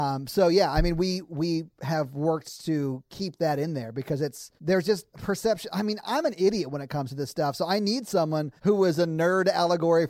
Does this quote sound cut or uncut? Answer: cut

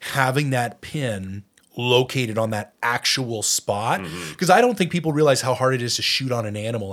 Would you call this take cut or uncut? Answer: cut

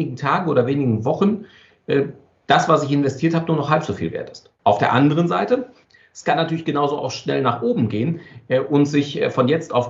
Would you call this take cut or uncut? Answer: uncut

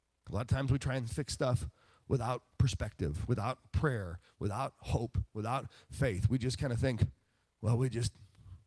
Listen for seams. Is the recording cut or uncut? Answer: uncut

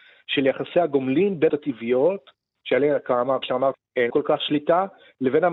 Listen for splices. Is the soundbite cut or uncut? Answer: cut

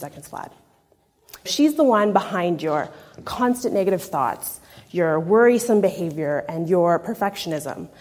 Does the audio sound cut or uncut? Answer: cut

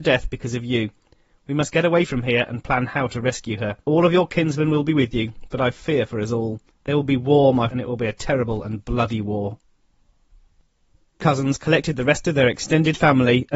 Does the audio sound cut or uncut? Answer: cut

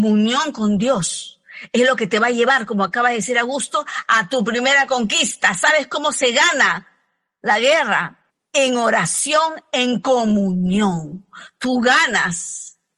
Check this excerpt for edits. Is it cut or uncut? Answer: cut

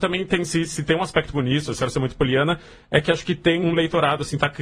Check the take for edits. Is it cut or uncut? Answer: cut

